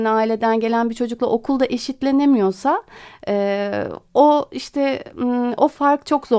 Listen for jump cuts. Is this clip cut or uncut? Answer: uncut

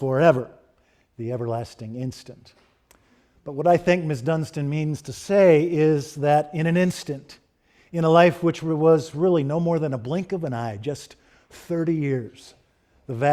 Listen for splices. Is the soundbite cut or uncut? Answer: uncut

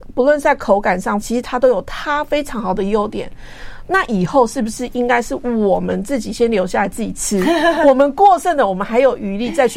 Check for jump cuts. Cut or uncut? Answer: cut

